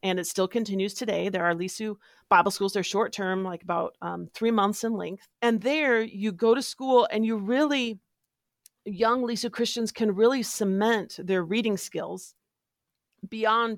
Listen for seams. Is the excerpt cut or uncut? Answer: uncut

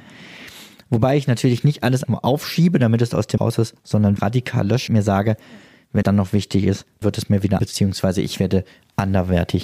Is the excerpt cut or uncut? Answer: cut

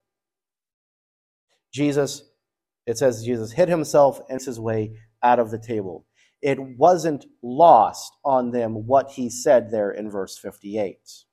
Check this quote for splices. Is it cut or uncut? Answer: cut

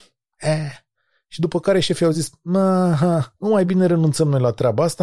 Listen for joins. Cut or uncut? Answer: uncut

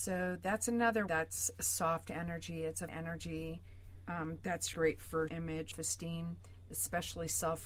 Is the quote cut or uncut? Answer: cut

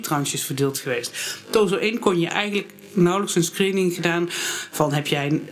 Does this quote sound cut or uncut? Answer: cut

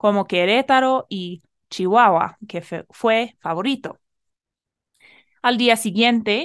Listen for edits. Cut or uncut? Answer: cut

